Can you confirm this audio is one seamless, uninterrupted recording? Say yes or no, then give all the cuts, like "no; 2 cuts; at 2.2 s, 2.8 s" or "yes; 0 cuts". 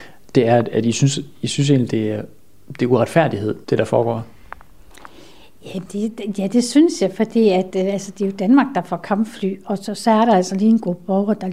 no; 2 cuts; at 3.6 s, 7.7 s